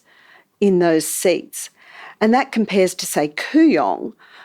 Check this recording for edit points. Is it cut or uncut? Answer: uncut